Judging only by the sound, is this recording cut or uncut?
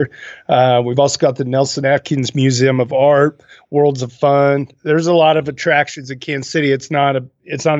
uncut